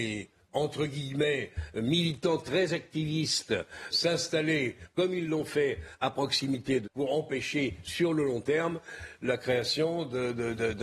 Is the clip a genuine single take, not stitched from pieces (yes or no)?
no